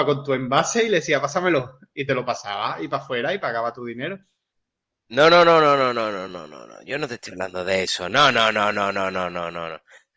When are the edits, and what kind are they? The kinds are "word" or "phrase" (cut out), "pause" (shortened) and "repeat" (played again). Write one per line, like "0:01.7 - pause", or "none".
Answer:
none